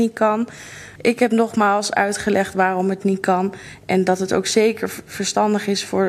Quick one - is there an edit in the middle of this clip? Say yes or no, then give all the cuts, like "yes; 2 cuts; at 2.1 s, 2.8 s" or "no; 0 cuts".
no; 0 cuts